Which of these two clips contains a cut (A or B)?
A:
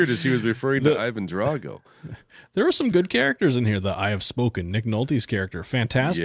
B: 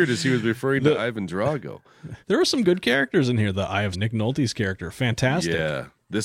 B